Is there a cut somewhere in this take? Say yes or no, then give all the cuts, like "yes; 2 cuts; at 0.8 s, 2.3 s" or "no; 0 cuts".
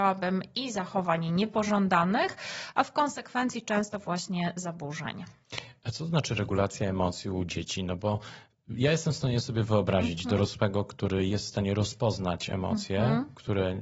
no; 0 cuts